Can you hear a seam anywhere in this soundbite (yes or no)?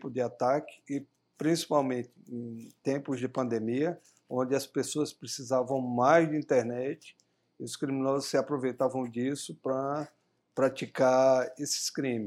no